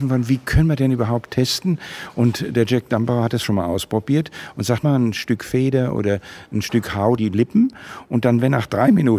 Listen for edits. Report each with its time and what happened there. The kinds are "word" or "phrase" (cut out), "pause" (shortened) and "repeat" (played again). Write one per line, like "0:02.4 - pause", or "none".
0:03.4 - word
0:04.8 - word
0:07.2 - word